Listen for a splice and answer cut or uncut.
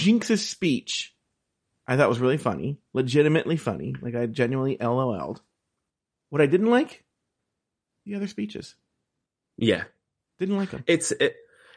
uncut